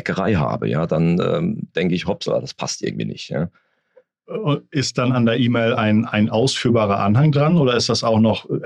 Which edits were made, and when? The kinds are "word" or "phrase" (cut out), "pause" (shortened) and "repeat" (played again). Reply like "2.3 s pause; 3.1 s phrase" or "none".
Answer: none